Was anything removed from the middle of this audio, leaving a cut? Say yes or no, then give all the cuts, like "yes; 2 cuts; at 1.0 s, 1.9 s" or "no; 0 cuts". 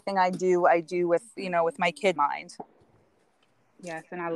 yes; 1 cut; at 2.2 s